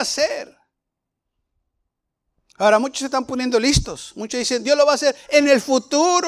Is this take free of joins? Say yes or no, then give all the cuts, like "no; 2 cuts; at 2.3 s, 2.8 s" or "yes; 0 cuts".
yes; 0 cuts